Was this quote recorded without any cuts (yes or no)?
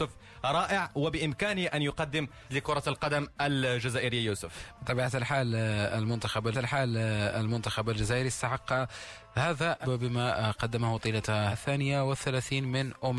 no